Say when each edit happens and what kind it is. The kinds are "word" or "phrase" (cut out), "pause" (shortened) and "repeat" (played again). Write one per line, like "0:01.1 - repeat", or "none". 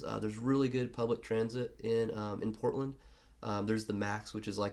none

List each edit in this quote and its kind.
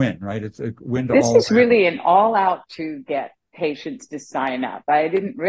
0:02.6 - word

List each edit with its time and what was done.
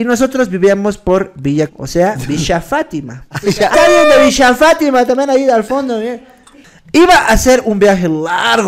0:01.7 - word
0:03.7 - word

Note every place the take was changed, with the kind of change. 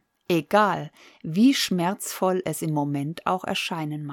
none

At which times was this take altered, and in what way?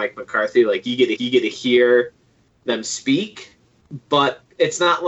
0:01.2 - repeat

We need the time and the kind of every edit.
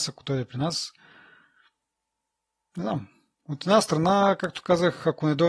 none

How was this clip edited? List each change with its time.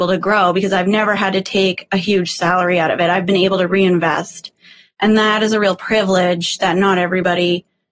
none

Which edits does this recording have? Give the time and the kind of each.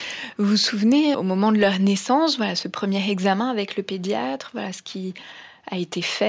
0:01.1 - word

